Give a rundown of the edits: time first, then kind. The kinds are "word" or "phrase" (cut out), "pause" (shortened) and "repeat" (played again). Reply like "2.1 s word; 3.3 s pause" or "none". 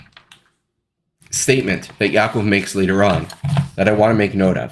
none

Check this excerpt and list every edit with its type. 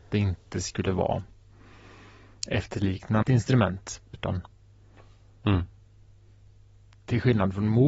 3.2 s phrase; 4.1 s phrase

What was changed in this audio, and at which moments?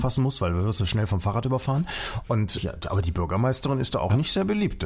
2.6 s word

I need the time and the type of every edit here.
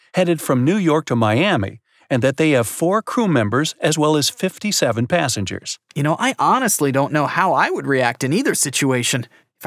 none

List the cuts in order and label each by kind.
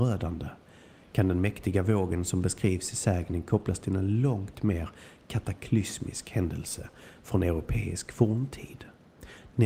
none

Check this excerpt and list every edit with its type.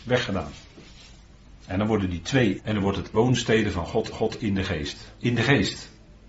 1.6 s pause; 2.6 s word; 3.1 s word; 4.1 s repeat

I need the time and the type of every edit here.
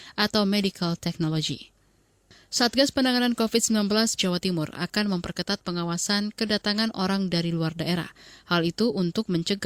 4.2 s word

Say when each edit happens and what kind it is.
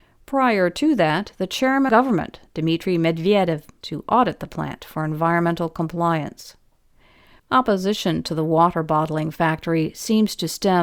1.9 s phrase; 3.8 s word

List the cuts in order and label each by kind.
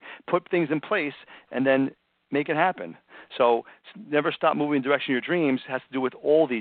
none

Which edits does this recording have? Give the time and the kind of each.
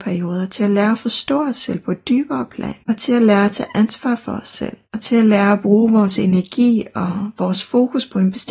2.8 s pause; 4.9 s pause

